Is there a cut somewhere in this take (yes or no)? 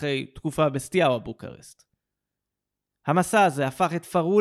no